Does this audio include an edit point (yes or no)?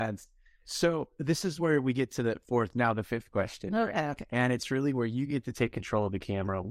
no